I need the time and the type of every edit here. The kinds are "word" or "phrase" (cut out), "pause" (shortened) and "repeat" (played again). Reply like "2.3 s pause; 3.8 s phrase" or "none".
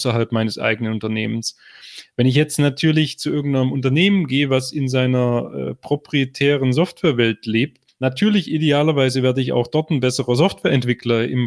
7.9 s pause

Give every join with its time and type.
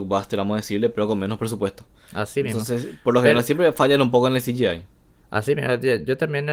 none

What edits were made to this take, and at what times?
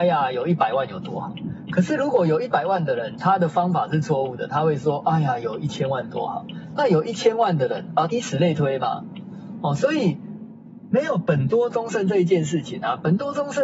8.1 s phrase

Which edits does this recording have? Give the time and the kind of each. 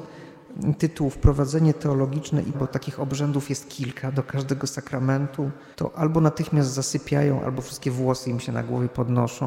2.5 s word; 5.7 s pause

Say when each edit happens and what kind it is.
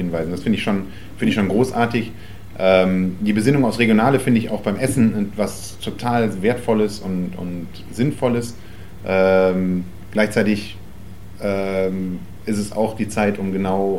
none

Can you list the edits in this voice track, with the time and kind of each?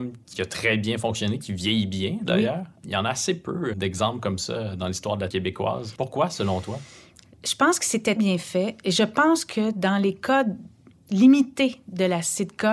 3.7 s word; 5.3 s word; 8.2 s word

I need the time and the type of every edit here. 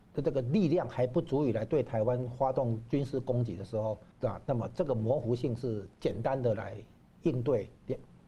4.1 s pause; 5.9 s pause

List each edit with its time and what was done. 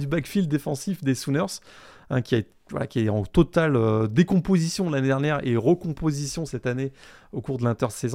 none

